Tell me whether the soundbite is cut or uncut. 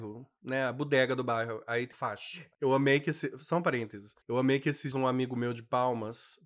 cut